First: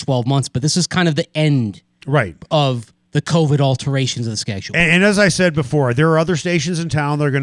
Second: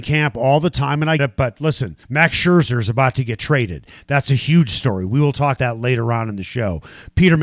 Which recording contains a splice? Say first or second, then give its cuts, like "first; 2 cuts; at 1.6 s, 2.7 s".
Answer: second; 3 cuts; at 1.2 s, 2.0 s, 5.6 s